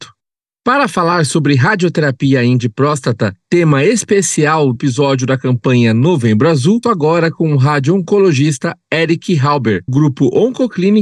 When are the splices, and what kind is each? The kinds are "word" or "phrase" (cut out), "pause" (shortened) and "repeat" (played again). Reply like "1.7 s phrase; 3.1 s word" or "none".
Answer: 2.6 s word; 4.7 s word; 6.8 s word; 9.9 s word